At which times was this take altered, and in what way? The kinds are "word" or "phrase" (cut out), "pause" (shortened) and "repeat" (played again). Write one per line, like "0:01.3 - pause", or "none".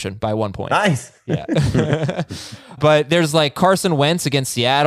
0:02.8 - word